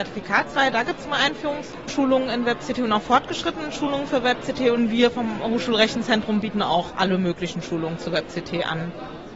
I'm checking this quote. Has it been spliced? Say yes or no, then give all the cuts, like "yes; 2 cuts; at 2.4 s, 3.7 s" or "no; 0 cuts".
no; 0 cuts